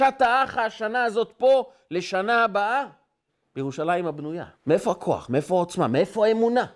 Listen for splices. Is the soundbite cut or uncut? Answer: cut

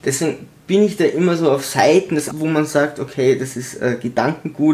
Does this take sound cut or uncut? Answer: cut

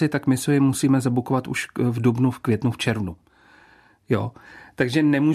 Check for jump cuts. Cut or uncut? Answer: uncut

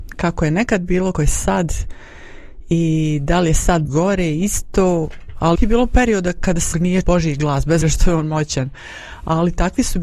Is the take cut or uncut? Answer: cut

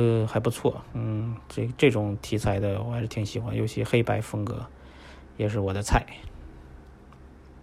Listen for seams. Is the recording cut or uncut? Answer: uncut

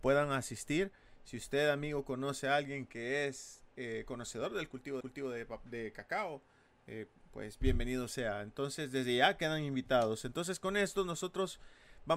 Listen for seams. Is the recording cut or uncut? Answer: cut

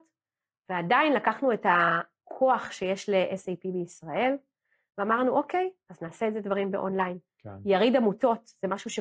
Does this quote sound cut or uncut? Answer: uncut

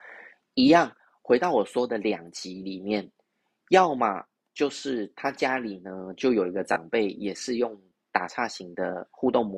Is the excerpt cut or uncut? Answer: uncut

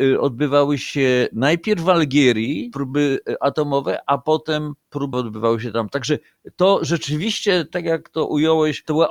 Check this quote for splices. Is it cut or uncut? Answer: cut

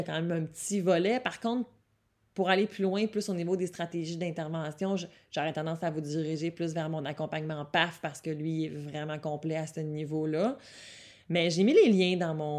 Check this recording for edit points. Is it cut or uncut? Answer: uncut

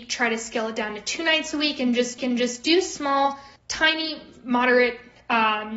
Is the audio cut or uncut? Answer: cut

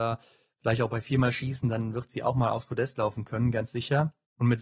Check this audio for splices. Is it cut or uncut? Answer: uncut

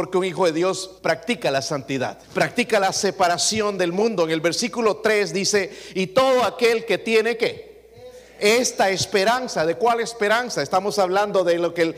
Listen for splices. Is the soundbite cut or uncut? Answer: cut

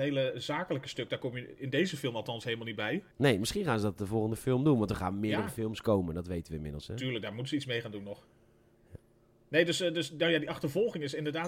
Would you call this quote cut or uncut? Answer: cut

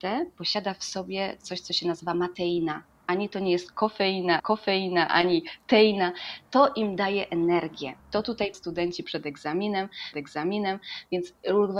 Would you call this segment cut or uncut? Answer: cut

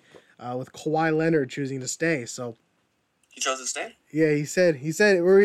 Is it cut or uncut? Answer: uncut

